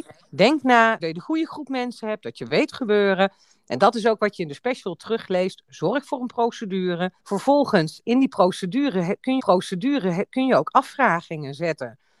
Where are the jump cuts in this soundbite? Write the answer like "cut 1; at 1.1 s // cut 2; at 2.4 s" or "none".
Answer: cut 1; at 1.0 s // cut 2; at 2.7 s // cut 3; at 7.2 s // cut 4; at 9.4 s